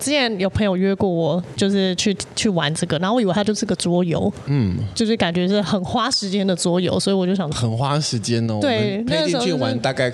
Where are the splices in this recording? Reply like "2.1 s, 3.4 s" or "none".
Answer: 1.6 s, 7.5 s

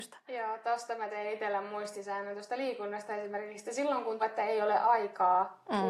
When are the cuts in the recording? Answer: 4.2 s

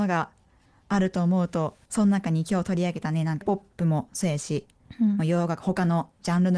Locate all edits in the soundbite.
1.8 s, 3.4 s

